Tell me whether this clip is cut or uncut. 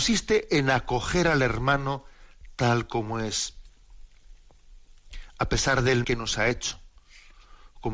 cut